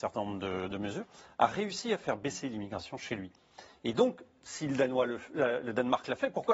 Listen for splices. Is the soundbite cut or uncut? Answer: uncut